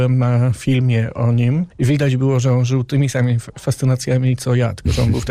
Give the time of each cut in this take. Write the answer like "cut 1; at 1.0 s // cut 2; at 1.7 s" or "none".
cut 1; at 1.7 s

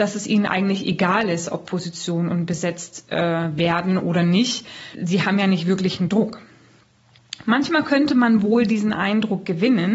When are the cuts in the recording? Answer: cut 1; at 4.9 s

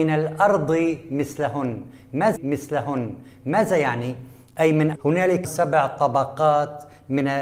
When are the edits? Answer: cut 1; at 2.4 s // cut 2; at 4.9 s // cut 3; at 5.4 s

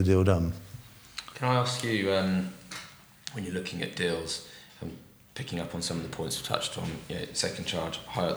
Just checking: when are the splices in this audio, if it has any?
none

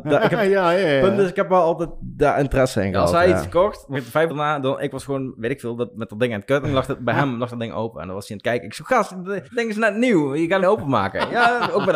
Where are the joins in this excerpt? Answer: cut 1; at 3.9 s // cut 2; at 4.3 s // cut 3; at 6.6 s // cut 4; at 9.5 s // cut 5; at 10.6 s

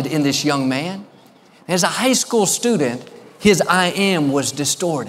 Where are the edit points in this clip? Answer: none

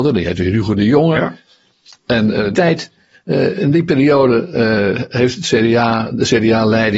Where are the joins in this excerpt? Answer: cut 1; at 2.5 s

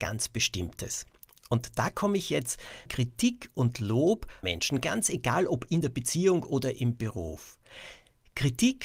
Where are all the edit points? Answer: cut 1; at 2.9 s // cut 2; at 4.4 s

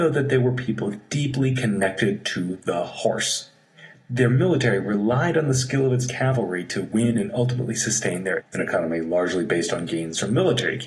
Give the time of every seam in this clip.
cut 1; at 8.4 s

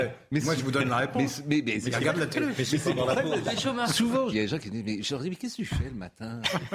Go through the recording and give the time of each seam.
cut 1; at 4.3 s

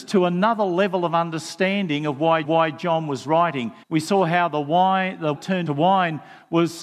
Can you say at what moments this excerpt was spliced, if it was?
cut 1; at 2.4 s // cut 2; at 3.8 s // cut 3; at 5.3 s // cut 4; at 5.7 s

